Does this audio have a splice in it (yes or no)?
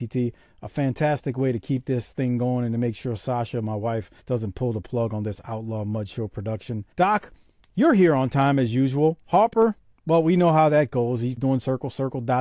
yes